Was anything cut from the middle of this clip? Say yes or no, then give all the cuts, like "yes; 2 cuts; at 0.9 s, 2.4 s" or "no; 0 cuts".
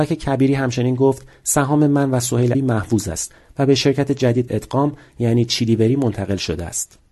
yes; 2 cuts; at 2.5 s, 4.5 s